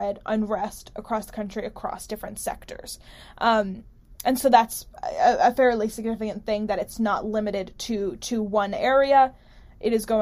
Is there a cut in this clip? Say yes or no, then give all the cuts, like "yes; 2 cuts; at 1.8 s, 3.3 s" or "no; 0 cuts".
no; 0 cuts